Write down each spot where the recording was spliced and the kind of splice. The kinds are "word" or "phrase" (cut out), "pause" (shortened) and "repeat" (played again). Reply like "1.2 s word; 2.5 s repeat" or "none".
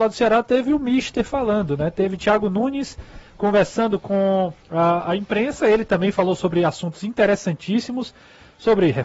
4.6 s pause